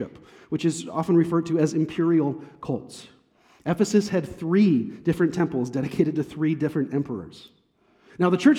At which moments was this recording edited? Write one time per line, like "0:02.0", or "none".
none

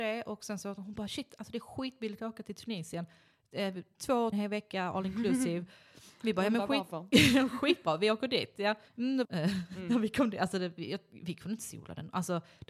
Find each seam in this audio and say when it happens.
0:04.3
0:08.9
0:09.2

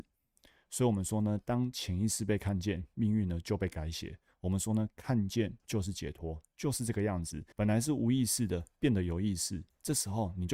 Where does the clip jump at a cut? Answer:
0:07.5

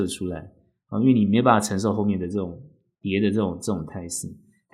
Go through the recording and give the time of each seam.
none

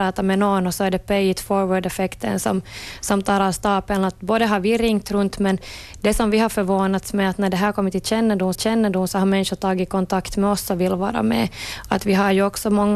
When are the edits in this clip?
0:08.5

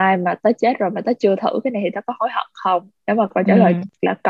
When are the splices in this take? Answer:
0:03.0

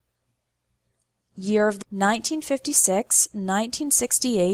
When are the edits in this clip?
0:01.8

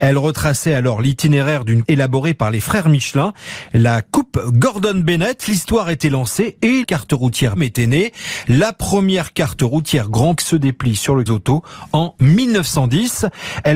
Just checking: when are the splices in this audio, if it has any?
0:01.8
0:06.8
0:07.6
0:10.4
0:11.3

